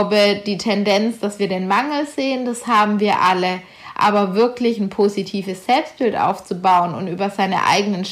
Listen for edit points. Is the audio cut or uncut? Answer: uncut